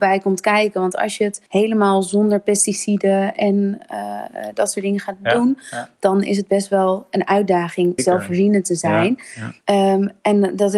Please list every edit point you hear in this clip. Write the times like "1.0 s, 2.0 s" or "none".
1.5 s, 8.0 s, 9.6 s